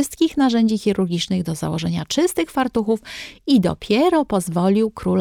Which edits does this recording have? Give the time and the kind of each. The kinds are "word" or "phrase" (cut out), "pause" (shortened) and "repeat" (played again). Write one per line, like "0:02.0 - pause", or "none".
none